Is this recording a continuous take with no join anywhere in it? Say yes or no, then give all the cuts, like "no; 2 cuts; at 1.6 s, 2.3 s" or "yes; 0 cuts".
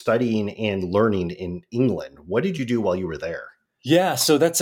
yes; 0 cuts